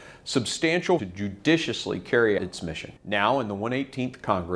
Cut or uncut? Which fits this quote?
cut